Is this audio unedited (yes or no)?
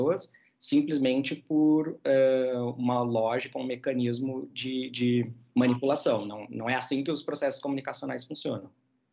yes